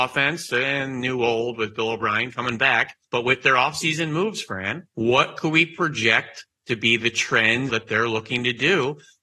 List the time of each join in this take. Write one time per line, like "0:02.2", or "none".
0:03.0
0:04.9
0:07.7